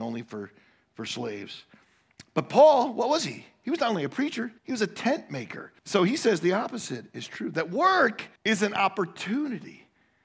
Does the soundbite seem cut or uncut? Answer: cut